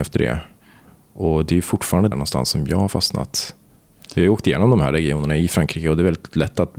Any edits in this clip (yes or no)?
yes